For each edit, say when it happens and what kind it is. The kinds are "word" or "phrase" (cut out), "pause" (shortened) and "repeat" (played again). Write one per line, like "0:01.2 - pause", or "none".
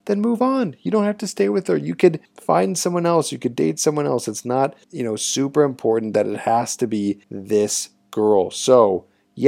0:02.3 - pause
0:04.8 - pause
0:07.2 - pause